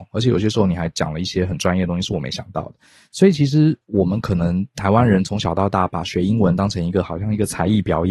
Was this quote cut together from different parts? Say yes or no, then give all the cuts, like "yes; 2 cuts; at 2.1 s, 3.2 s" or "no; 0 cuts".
no; 0 cuts